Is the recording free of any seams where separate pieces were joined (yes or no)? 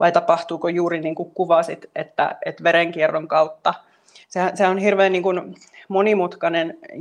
yes